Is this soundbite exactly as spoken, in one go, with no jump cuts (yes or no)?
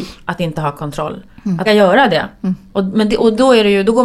no